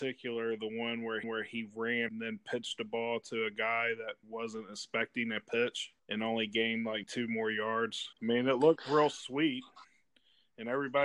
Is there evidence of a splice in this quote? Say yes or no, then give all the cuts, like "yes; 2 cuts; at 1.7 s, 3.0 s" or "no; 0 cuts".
yes; 6 cuts; at 1.2 s, 2.1 s, 4.2 s, 6.0 s, 7.0 s, 8.1 s